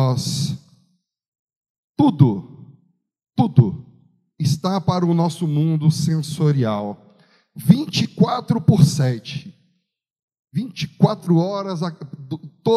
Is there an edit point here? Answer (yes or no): no